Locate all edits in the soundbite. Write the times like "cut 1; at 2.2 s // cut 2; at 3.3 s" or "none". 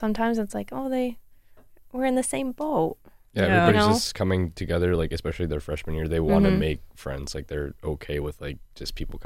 none